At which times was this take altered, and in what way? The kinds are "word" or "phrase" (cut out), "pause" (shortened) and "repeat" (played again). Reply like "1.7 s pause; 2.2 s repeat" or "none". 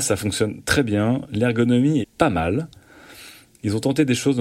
2.0 s word